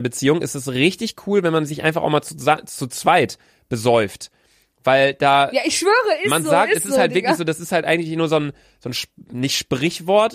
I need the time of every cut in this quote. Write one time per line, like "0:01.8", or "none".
none